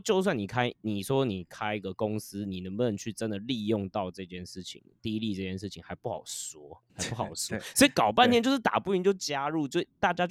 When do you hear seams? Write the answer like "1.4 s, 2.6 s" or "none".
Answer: 6.9 s